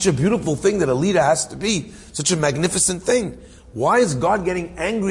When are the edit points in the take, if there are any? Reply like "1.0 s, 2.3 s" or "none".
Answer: none